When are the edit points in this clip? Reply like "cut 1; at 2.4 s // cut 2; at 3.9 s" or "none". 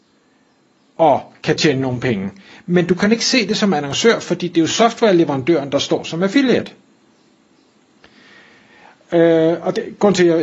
none